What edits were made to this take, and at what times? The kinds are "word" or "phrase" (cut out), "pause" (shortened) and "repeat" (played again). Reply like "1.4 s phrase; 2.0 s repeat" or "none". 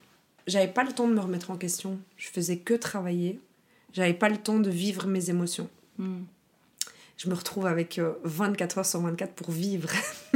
none